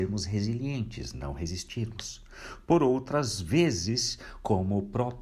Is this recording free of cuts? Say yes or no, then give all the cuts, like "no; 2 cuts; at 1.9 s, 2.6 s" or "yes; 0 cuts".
yes; 0 cuts